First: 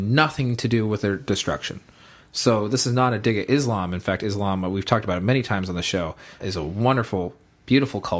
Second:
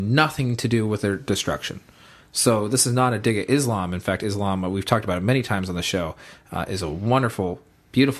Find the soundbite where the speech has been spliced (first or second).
first